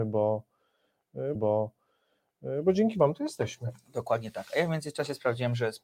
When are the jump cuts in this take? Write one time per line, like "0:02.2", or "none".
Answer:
0:01.4